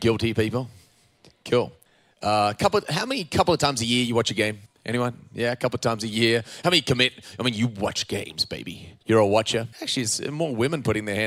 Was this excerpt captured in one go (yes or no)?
no